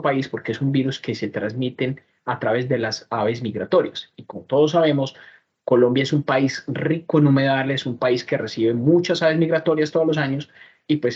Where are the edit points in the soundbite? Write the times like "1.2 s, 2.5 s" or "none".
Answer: none